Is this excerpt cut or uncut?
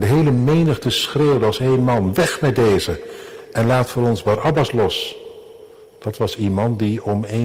uncut